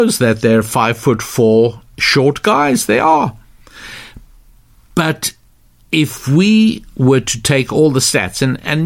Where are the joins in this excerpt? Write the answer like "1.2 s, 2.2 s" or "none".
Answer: none